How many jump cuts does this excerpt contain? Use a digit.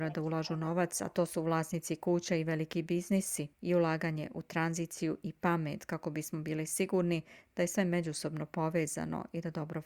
1